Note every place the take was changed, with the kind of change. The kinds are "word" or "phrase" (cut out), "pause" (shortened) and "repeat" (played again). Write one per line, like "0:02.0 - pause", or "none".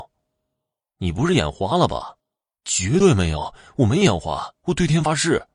0:02.2 - pause
0:04.5 - pause